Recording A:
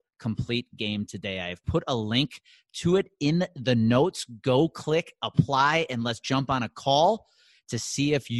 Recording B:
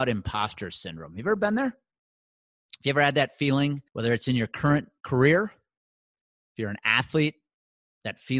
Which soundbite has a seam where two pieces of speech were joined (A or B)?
B